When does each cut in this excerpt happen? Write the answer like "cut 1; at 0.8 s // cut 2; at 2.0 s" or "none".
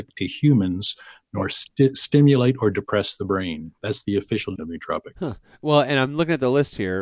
cut 1; at 4.6 s